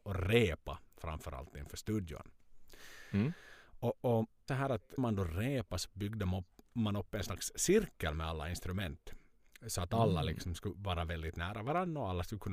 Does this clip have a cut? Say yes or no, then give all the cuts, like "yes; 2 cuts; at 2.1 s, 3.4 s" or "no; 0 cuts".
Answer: yes; 2 cuts; at 4.5 s, 5.0 s